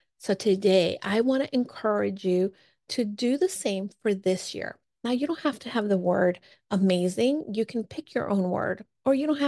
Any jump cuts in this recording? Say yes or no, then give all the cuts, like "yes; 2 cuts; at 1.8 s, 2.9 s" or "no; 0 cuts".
no; 0 cuts